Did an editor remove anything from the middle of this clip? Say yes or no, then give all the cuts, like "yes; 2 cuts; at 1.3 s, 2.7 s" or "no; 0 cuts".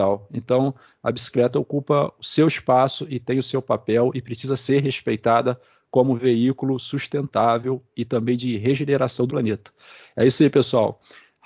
yes; 1 cut; at 9.3 s